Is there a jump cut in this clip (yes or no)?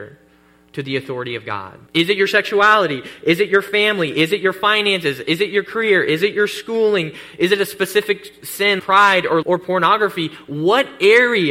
yes